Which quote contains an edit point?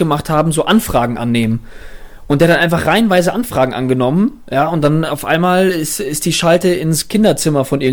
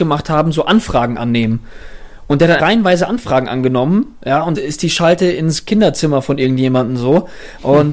second; 2 cuts; at 2.6 s, 4.5 s

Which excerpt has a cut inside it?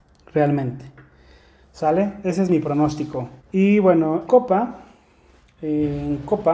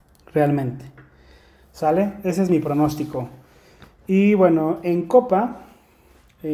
first; 2 cuts; at 3.4 s, 4.3 s

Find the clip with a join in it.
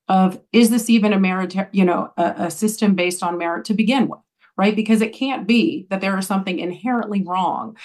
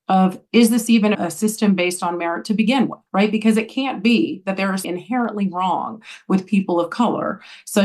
second; 3 cuts; at 1.1 s, 3.1 s, 4.8 s

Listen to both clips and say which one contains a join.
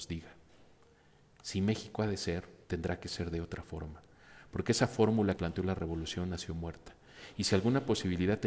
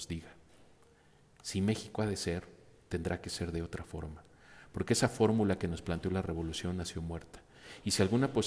first; 2 cuts; at 2.6 s, 5.4 s

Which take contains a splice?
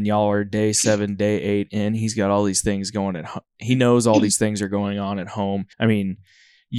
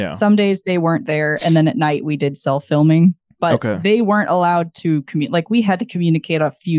first; 1 cut; at 5.7 s

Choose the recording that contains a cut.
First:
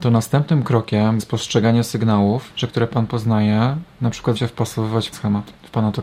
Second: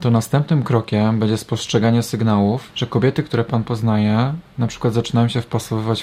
first; 4 cuts; at 1.2 s, 2.7 s, 4.4 s, 5.1 s

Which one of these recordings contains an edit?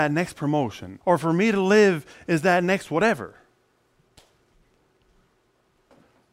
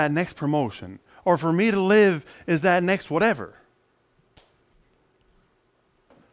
first; 1 cut; at 1.0 s

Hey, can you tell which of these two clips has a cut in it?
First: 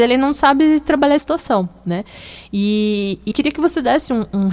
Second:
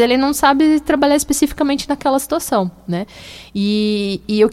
first; 2 cuts; at 1.2 s, 3.3 s

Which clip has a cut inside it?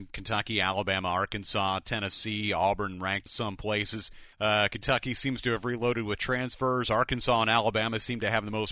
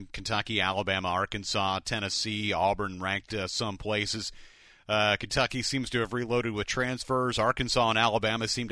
first; 2 cuts; at 3.3 s, 4.3 s

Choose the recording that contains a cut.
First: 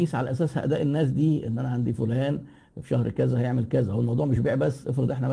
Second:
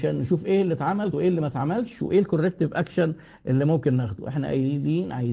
second; 1 cut; at 1.1 s

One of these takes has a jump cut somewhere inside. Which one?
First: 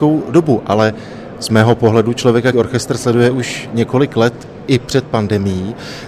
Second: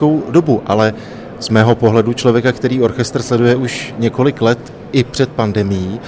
first; 1 cut; at 2.5 s

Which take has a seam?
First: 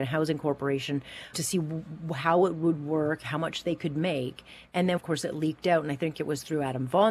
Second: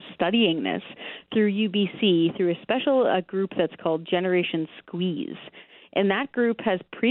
first; 2 cuts; at 1.3 s, 5.0 s

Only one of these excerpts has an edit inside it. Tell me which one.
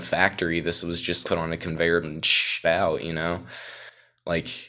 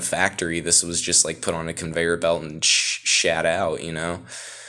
first; 3 cuts; at 1.2 s, 2.0 s, 2.6 s

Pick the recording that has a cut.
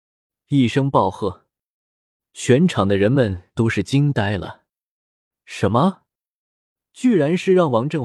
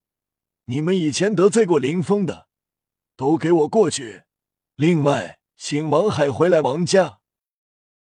second; 1 cut; at 5.5 s

